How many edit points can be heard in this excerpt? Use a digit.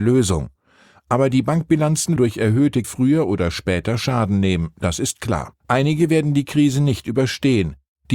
3